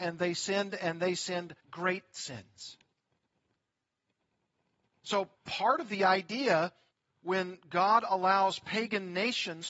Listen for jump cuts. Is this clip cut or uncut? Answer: cut